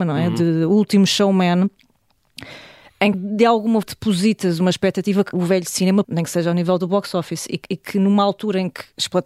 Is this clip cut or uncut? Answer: cut